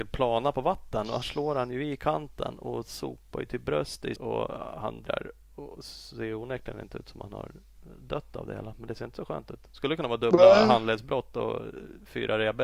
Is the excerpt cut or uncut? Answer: cut